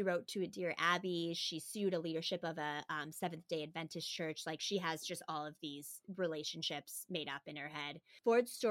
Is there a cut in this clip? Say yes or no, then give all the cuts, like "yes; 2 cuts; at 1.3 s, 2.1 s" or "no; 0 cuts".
no; 0 cuts